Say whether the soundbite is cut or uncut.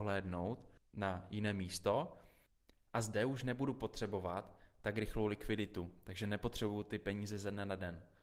uncut